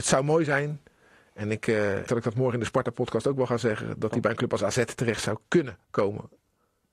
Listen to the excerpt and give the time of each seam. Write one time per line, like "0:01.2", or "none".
0:02.1
0:05.8

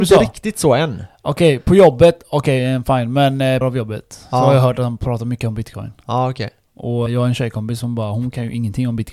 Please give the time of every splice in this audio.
0:03.6
0:07.1

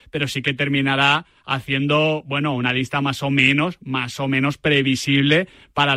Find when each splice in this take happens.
none

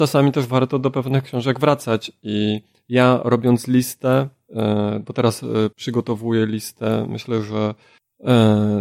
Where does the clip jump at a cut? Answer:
0:05.7

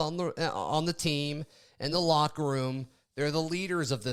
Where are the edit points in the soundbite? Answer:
none

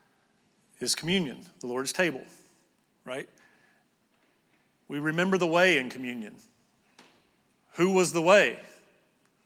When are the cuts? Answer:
none

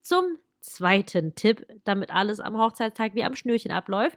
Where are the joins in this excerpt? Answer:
none

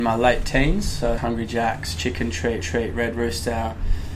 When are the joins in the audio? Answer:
0:01.2
0:02.6

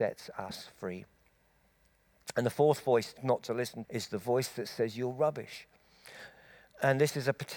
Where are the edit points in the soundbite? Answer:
0:03.2
0:03.8

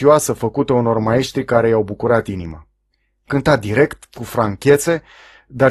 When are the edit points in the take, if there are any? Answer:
none

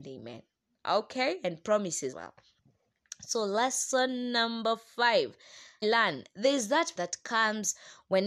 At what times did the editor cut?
0:02.1
0:05.8
0:07.0

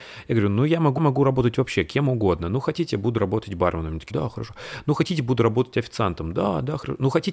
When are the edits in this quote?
0:01.0
0:04.1

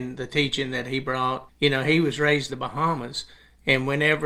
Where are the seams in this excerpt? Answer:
0:01.5
0:02.5

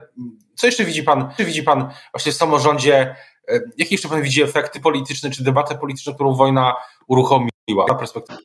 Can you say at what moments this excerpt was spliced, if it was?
0:01.4
0:04.7

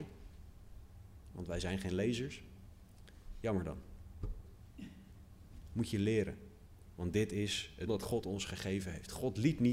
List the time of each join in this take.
0:07.9

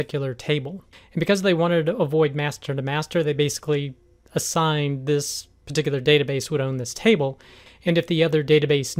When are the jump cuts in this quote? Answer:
none

